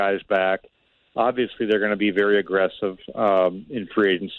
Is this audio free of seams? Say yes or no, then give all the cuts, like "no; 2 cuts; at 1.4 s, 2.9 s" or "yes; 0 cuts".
yes; 0 cuts